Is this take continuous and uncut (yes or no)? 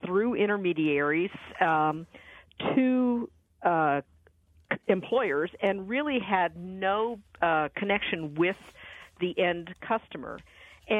yes